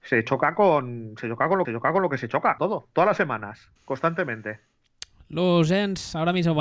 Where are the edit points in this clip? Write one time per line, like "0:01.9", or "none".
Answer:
0:01.6
0:02.6
0:03.8